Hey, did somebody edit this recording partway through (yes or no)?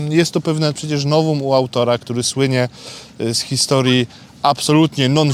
no